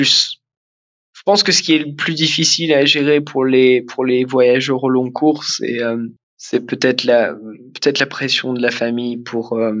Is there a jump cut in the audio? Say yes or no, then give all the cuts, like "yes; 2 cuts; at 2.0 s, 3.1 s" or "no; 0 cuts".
yes; 1 cut; at 6.2 s